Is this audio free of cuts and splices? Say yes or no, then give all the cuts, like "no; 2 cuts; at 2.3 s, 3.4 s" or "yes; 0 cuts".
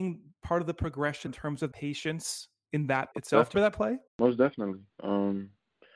no; 6 cuts; at 1.3 s, 1.7 s, 3.1 s, 3.5 s, 4.1 s, 4.9 s